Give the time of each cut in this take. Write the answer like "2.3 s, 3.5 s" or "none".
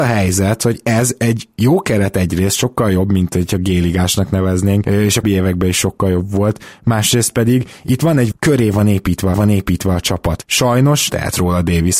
5.2 s, 8.3 s, 9.3 s, 11.1 s